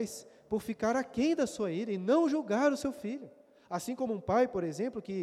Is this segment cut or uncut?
uncut